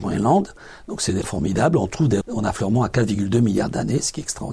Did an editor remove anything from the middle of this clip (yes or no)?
yes